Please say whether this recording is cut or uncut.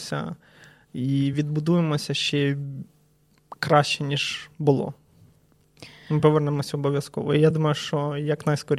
uncut